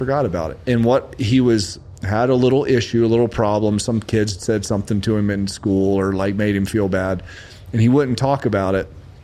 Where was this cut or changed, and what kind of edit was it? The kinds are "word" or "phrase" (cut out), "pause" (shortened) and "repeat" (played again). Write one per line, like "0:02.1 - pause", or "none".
none